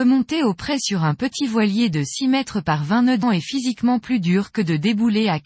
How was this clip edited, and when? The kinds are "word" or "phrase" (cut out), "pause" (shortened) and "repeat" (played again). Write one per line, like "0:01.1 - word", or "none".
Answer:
0:03.2 - word